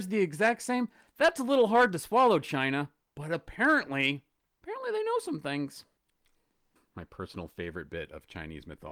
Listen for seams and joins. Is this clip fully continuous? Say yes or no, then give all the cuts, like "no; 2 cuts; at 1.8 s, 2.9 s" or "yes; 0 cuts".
yes; 0 cuts